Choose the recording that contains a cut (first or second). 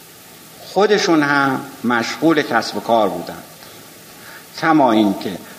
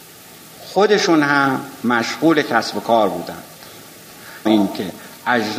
second